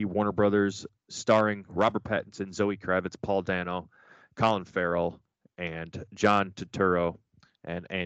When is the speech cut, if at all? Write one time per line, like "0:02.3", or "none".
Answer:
none